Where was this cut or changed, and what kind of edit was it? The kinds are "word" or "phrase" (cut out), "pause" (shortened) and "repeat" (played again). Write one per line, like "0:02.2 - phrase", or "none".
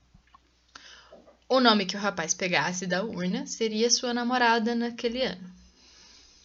none